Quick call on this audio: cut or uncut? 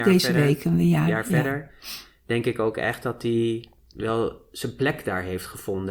uncut